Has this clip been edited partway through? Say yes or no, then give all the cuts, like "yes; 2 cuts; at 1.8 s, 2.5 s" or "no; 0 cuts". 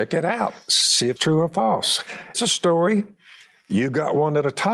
yes; 2 cuts; at 1.2 s, 2.3 s